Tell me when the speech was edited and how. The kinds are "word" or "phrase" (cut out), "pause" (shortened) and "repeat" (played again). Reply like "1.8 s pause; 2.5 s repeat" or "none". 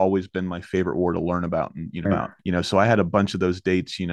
2.1 s word; 2.4 s pause